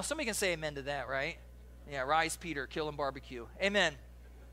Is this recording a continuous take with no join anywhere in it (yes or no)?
yes